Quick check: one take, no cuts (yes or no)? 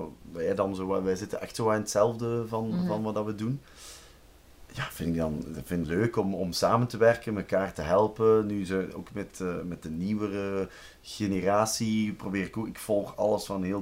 no